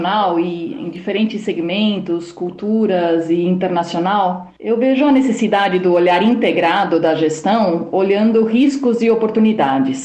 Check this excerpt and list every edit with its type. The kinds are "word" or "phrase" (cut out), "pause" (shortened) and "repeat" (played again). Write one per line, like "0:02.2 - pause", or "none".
none